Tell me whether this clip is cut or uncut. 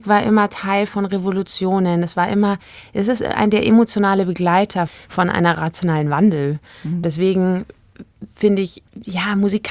uncut